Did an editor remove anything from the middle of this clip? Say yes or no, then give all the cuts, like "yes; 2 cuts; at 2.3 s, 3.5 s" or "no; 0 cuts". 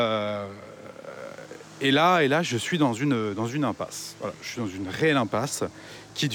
no; 0 cuts